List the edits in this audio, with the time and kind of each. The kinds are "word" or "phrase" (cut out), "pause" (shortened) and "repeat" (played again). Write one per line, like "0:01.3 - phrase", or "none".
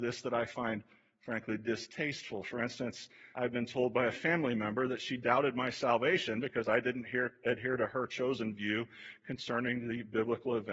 0:03.3 - word